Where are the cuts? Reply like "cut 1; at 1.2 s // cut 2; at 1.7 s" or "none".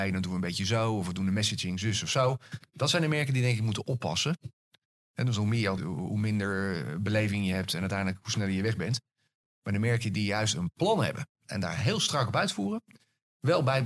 cut 1; at 5.8 s